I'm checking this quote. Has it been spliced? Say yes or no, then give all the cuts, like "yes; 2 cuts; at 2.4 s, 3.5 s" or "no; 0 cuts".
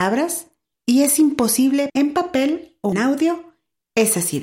yes; 2 cuts; at 1.9 s, 2.9 s